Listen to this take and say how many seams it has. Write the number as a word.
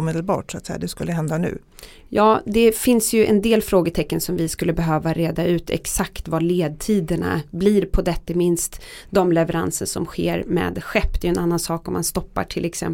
one